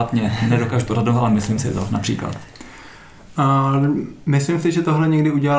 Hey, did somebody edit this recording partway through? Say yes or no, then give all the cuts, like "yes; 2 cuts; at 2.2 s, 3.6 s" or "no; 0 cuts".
no; 0 cuts